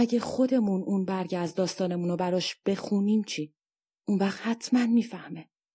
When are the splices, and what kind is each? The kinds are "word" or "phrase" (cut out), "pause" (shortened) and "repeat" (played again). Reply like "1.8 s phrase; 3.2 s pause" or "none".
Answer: none

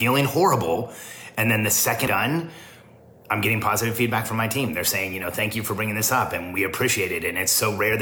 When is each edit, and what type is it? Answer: 2.1 s word

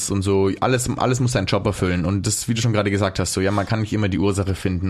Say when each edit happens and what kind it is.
none

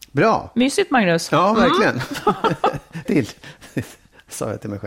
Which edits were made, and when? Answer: 3.1 s word

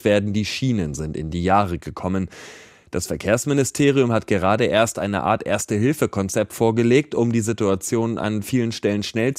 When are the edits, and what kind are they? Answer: none

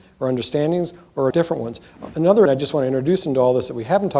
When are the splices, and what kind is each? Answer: 1.3 s word; 2.5 s word

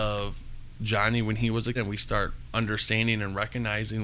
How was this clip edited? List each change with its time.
1.8 s word

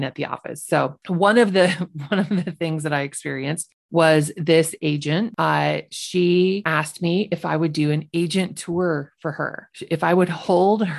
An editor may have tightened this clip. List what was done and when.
9.7 s pause

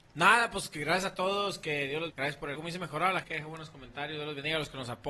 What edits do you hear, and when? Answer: 2.1 s word; 2.5 s word; 3.2 s word

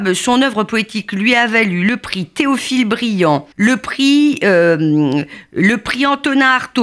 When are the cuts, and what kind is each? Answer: 3.5 s pause

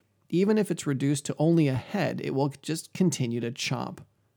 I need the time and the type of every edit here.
none

